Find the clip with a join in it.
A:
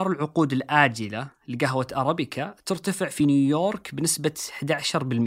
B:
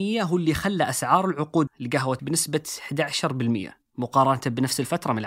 B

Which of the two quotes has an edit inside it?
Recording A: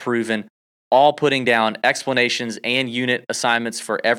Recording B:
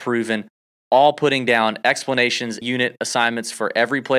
B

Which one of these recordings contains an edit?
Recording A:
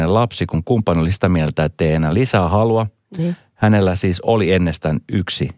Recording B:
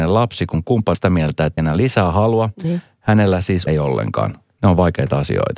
B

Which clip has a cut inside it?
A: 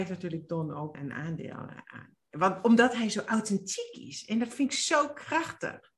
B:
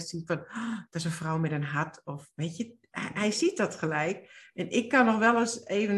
A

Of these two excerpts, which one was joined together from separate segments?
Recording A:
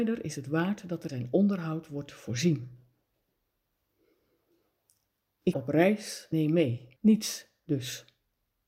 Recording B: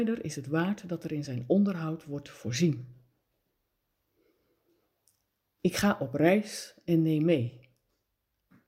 A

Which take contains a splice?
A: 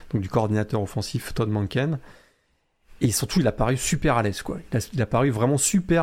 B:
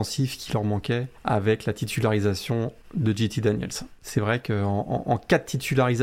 B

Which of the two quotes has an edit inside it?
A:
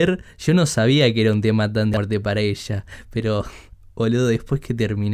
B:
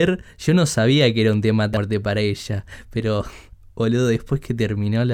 B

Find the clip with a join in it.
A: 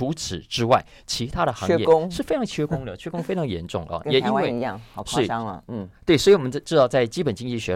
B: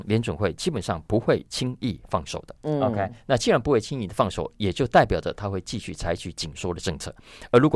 B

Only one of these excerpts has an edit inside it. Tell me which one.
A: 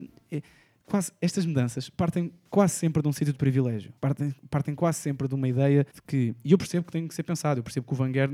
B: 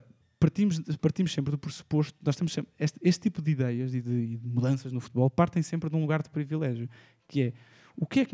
A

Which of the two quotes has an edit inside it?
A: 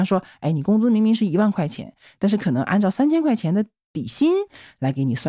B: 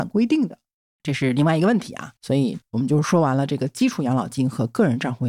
B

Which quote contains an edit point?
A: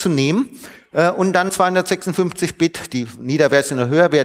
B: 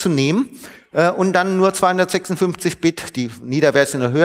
A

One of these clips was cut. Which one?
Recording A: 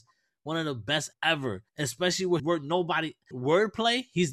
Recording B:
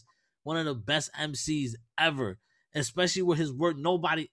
A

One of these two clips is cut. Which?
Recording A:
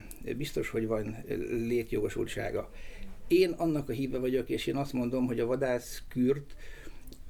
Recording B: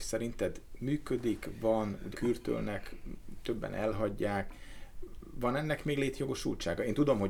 B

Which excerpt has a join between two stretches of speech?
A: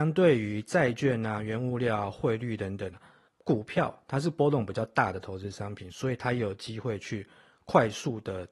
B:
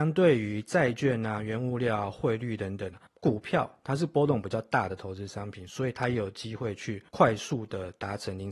B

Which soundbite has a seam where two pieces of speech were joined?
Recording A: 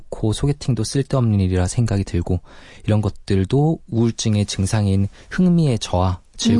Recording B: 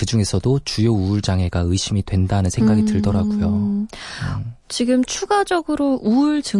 B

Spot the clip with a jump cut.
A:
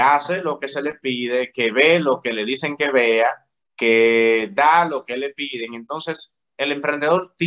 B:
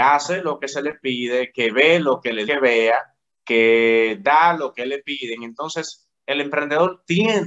B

